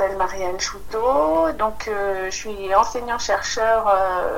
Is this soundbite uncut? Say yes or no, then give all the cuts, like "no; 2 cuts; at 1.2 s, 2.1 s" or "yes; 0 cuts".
yes; 0 cuts